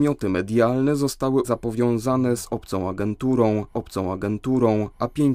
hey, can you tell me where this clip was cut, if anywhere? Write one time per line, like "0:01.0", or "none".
0:01.4
0:03.7